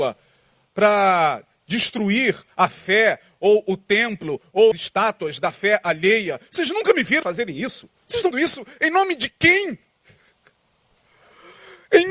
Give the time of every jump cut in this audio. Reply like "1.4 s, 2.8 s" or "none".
4.7 s, 7.2 s, 8.0 s, 8.3 s